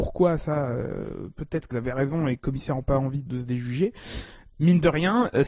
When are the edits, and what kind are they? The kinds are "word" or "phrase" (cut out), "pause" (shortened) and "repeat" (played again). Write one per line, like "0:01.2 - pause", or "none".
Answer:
0:01.7 - word
0:02.4 - word
0:03.3 - word